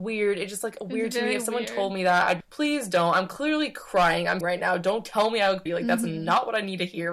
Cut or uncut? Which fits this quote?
cut